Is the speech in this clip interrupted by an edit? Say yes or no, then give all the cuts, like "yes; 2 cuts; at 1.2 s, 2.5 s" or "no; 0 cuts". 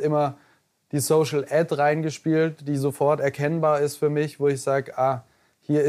no; 0 cuts